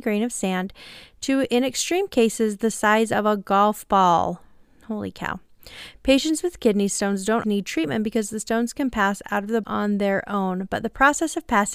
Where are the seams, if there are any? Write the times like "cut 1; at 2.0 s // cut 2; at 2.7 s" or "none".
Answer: cut 1; at 7.4 s // cut 2; at 9.6 s